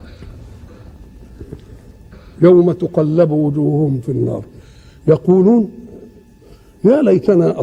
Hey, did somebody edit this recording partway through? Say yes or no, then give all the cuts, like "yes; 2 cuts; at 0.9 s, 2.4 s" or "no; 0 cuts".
no; 0 cuts